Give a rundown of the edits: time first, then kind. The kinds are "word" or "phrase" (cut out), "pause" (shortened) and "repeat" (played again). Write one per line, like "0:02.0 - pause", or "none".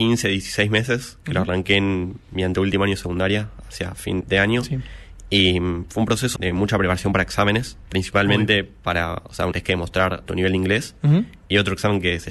0:04.2 - word
0:06.4 - word
0:09.5 - phrase
0:10.2 - word